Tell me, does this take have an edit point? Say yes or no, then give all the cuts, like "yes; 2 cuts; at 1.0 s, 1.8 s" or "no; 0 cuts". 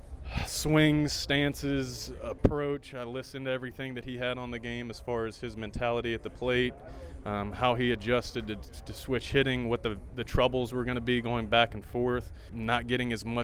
no; 0 cuts